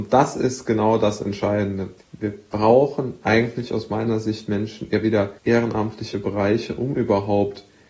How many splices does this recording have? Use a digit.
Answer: 2